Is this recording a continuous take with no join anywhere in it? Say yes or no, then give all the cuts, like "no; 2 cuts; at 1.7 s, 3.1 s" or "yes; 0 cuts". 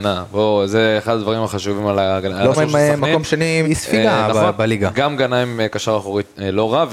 no; 2 cuts; at 2.5 s, 3.6 s